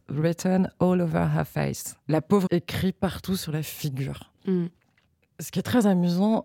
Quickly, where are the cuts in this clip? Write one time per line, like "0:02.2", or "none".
0:02.0
0:02.5